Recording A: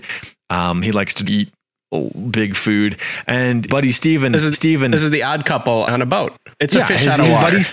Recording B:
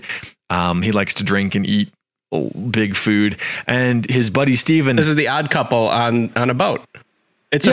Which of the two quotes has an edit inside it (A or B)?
A